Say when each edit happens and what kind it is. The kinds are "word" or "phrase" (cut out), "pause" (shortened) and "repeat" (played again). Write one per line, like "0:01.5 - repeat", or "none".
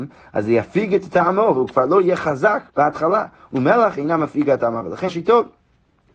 0:02.7 - word
0:05.1 - word